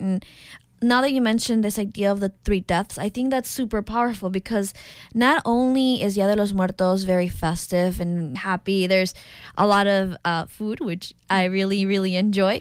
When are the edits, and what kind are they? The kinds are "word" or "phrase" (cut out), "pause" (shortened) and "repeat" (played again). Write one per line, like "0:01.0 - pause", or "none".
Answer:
0:08.4 - word